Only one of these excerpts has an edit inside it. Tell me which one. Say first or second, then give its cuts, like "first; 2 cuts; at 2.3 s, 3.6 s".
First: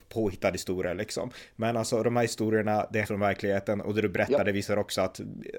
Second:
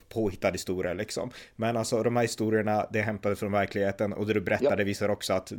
first; 1 cut; at 3.0 s